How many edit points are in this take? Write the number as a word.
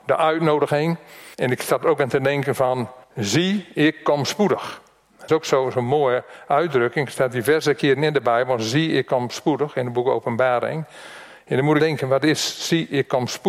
four